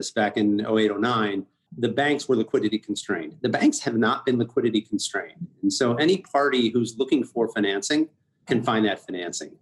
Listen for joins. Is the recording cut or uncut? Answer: uncut